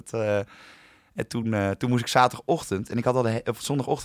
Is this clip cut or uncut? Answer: uncut